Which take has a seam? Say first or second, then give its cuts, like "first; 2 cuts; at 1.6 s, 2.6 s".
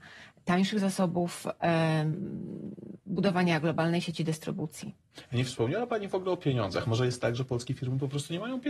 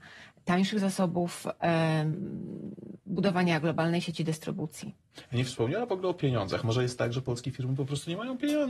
second; 1 cut; at 5.9 s